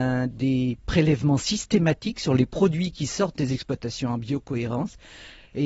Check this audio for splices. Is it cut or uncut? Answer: uncut